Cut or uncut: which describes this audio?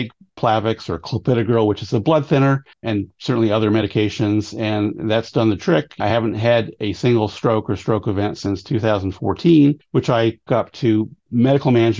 cut